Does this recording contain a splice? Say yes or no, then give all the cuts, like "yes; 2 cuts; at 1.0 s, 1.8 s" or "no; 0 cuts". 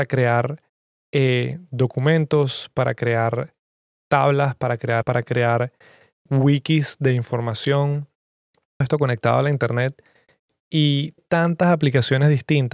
yes; 4 cuts; at 5.0 s, 6.2 s, 8.8 s, 11.2 s